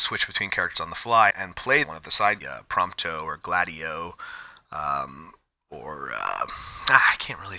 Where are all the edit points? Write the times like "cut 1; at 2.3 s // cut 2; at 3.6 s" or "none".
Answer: cut 1; at 1.3 s // cut 2; at 1.8 s // cut 3; at 2.4 s